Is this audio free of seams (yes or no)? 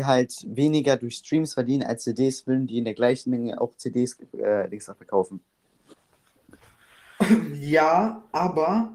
yes